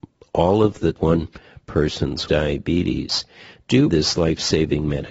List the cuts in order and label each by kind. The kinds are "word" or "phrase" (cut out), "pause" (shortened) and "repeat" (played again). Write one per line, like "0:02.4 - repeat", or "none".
0:00.9 - word
0:02.3 - word
0:03.9 - word